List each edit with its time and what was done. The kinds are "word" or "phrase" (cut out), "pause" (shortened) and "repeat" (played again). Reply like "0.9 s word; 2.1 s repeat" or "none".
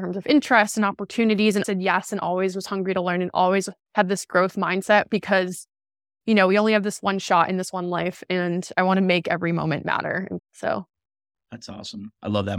1.6 s word; 10.4 s word

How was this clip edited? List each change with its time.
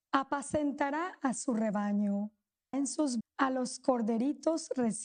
2.7 s word; 3.2 s word

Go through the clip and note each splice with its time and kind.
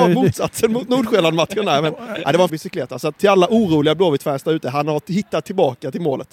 2.5 s word; 3.2 s pause

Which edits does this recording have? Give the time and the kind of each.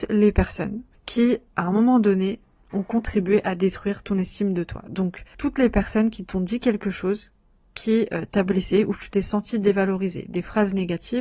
2.6 s pause

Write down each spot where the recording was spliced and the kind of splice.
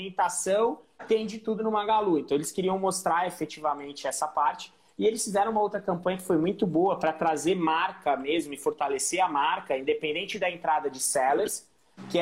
none

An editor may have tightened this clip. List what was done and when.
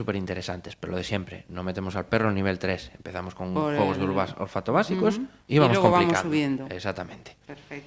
5.4 s pause

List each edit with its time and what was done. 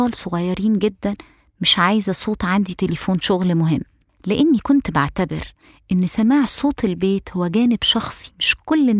none

